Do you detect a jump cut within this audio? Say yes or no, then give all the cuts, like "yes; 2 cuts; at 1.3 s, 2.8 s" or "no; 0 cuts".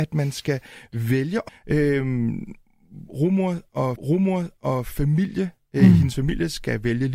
yes; 2 cuts; at 1.5 s, 4.0 s